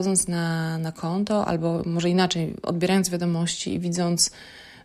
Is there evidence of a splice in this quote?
no; 0 cuts

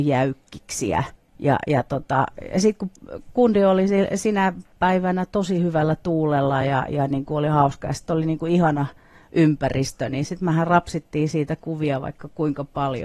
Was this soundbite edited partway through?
no; 0 cuts

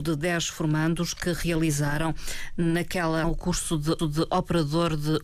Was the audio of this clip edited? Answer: yes; 2 cuts; at 3.2 s, 4.0 s

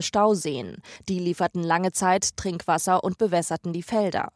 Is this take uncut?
yes; 0 cuts

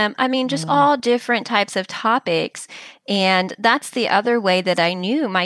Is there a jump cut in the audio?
no; 0 cuts

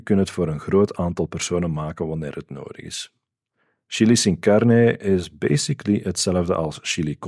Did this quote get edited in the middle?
no; 0 cuts

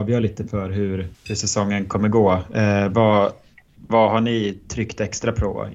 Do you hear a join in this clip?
yes; 1 cut; at 1.1 s

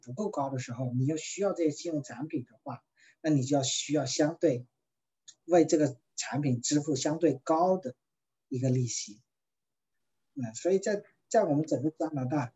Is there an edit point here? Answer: no; 0 cuts

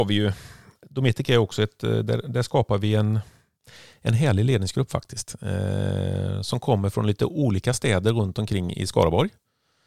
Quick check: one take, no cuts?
yes; 0 cuts

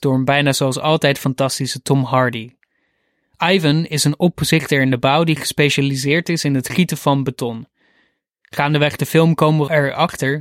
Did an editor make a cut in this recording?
no; 0 cuts

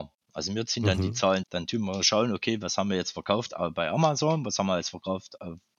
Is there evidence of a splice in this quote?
yes; 1 cut; at 1.4 s

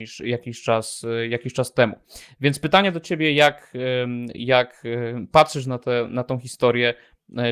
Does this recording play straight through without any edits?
yes; 0 cuts

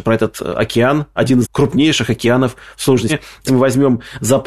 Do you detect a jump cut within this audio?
yes; 3 cuts; at 1.4 s, 3.1 s, 3.5 s

